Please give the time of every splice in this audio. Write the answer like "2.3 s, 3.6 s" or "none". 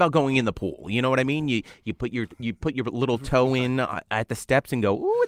none